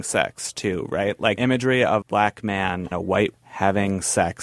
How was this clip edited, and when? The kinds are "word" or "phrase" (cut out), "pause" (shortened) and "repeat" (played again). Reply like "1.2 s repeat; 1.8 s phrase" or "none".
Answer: 1.4 s word; 2.0 s word; 2.9 s word; 3.3 s word